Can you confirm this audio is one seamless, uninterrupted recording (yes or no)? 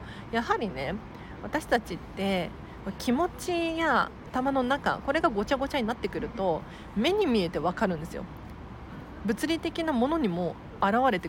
no